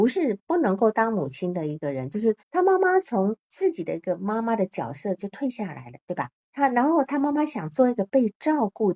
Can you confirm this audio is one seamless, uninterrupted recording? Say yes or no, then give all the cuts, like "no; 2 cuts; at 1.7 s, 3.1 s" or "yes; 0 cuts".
no; 3 cuts; at 2.4 s, 3.4 s, 6.4 s